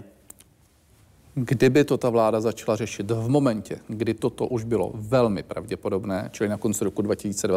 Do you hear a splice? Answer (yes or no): no